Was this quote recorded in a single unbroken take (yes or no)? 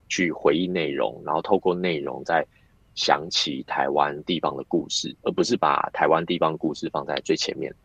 no